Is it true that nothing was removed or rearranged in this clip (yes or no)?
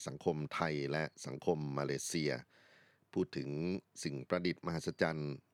yes